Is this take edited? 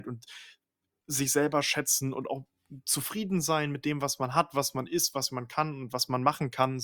no; 0 cuts

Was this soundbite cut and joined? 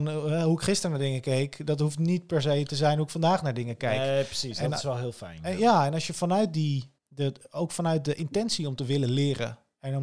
yes; 1 cut; at 7.0 s

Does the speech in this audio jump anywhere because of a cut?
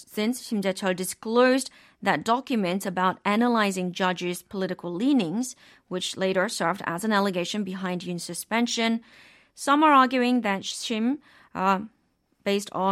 no; 0 cuts

